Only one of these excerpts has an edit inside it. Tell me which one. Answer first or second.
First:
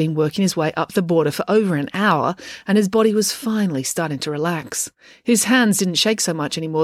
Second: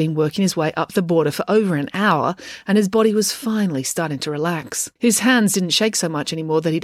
second